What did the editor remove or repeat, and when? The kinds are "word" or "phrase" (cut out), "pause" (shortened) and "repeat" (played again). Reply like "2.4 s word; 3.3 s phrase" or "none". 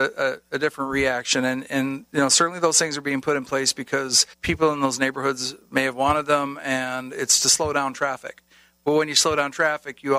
4.3 s pause